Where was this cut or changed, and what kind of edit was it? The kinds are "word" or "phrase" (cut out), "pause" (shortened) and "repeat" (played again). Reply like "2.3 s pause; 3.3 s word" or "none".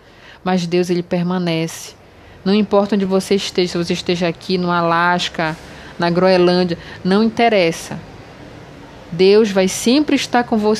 none

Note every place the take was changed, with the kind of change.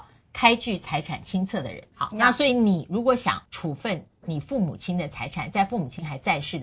1.9 s pause; 3.5 s pause

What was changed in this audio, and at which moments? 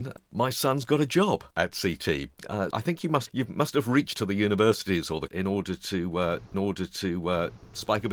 1.5 s pause; 2.7 s word; 3.3 s word; 4.1 s word; 5.3 s word; 6.5 s repeat

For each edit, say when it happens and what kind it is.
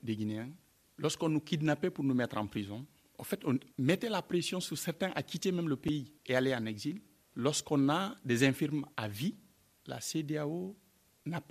8.9 s pause

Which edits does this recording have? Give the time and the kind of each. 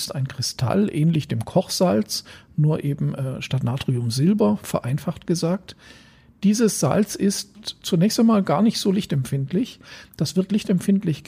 none

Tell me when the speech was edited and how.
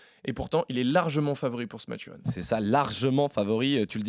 none

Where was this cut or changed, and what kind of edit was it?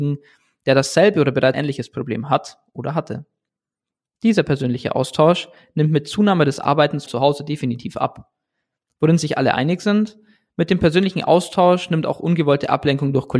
1.5 s word; 7.1 s word

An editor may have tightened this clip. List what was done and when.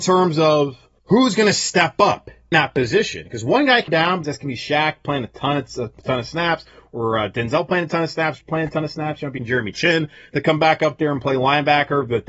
1.0 s pause; 2.5 s word; 3.9 s word; 4.2 s phrase; 8.4 s word; 9.4 s word

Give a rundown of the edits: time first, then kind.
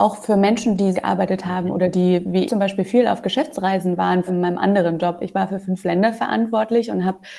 0.9 s phrase; 2.5 s word; 4.3 s word

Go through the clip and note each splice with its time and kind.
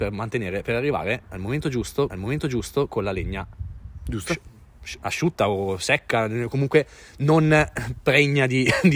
2.1 s repeat

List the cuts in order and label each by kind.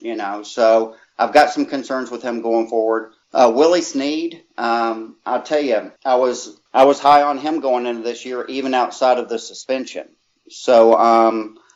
3.2 s pause; 6.0 s pause; 6.7 s pause

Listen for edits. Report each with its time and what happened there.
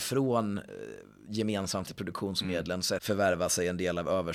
1.9 s word; 3.0 s word

